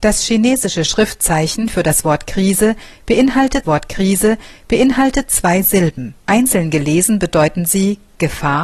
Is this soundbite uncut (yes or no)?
no